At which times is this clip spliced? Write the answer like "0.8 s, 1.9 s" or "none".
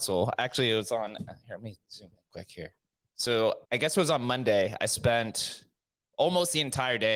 1.8 s, 2.2 s, 3.6 s